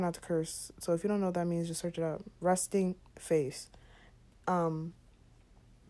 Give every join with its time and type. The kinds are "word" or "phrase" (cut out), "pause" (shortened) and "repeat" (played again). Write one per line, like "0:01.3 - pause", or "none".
none